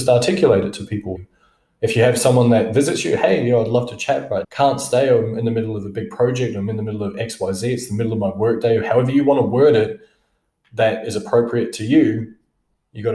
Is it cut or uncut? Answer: cut